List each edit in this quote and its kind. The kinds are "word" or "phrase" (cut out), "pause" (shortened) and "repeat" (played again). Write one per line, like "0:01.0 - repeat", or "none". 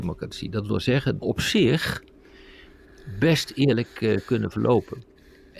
0:01.2 - phrase